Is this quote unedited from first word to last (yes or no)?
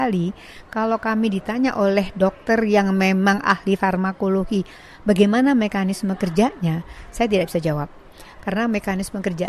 yes